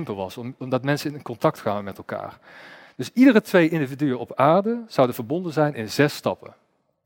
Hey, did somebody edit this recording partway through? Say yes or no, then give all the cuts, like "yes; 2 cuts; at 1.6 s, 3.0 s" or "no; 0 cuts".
no; 0 cuts